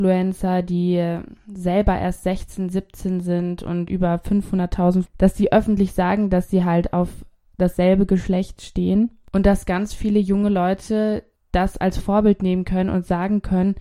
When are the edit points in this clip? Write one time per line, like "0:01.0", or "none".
0:03.9
0:05.1